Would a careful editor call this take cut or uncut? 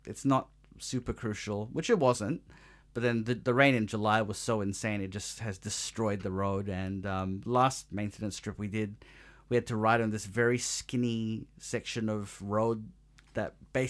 uncut